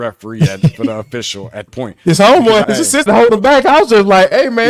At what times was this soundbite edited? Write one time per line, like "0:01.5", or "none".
0:01.7
0:02.6
0:03.1